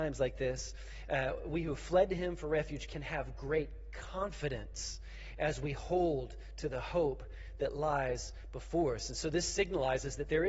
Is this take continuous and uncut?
yes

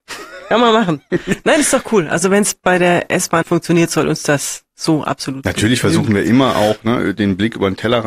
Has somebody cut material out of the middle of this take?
yes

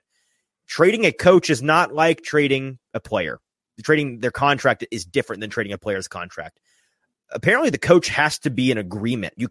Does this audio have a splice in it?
no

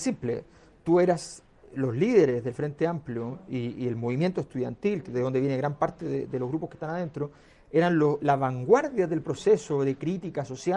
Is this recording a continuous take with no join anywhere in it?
yes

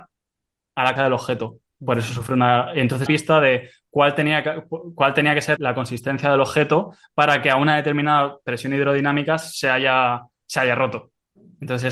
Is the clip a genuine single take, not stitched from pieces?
no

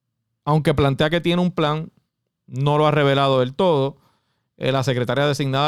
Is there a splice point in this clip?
no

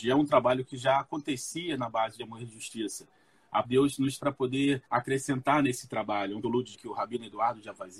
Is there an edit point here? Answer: yes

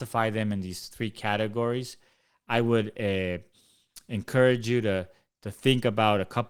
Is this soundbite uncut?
yes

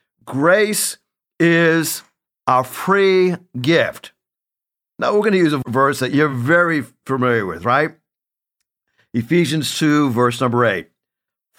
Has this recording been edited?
no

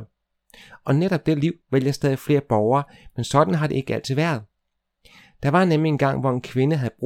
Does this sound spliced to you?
no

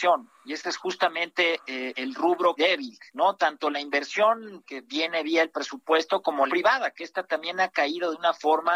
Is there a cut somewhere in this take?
yes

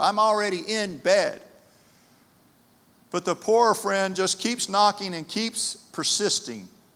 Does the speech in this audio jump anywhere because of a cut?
no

